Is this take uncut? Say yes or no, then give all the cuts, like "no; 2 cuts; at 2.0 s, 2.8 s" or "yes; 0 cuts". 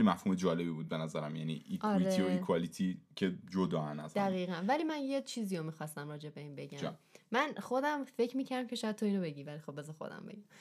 yes; 0 cuts